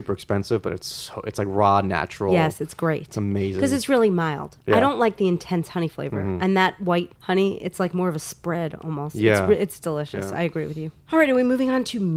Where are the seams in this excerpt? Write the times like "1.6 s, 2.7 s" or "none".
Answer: 7.2 s, 11.0 s